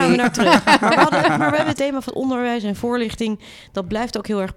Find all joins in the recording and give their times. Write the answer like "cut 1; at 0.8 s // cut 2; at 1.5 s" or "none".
cut 1; at 1.4 s // cut 2; at 1.8 s // cut 3; at 2.1 s